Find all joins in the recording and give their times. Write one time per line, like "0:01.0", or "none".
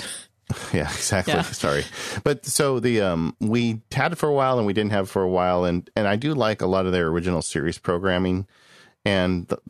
none